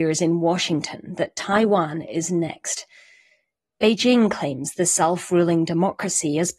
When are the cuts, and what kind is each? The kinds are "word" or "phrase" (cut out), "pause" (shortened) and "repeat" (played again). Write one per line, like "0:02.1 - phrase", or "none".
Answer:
none

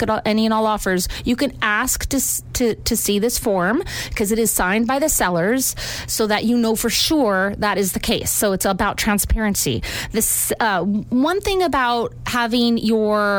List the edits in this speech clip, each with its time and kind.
none

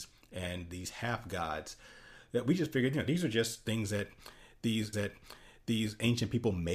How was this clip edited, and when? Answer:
0:04.9 - repeat

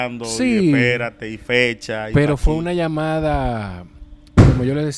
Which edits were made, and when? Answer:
none

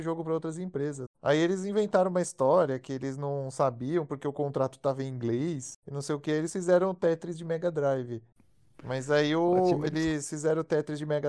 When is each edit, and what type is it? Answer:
0:01.1 - pause
0:05.8 - pause

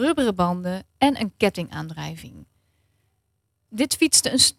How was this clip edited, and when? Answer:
none

